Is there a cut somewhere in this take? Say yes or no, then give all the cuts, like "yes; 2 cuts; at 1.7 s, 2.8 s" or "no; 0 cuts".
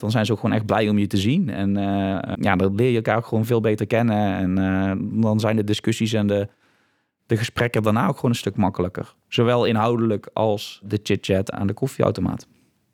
yes; 2 cuts; at 2.3 s, 11.5 s